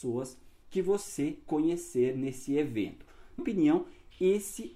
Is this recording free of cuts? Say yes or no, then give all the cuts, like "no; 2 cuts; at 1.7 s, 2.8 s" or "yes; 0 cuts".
no; 1 cut; at 3.4 s